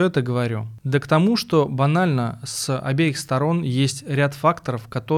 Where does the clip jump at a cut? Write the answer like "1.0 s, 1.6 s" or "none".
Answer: none